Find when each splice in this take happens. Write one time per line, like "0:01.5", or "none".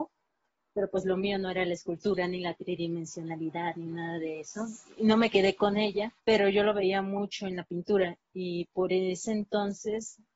0:06.2